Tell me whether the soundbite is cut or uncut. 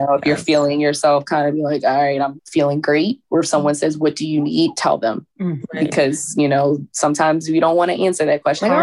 cut